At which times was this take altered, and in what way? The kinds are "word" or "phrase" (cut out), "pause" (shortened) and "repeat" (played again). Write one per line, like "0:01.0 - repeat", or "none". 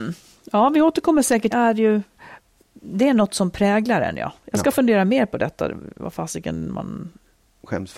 0:01.5 - phrase